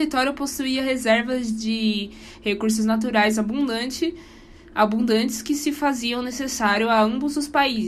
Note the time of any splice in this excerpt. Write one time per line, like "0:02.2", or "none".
none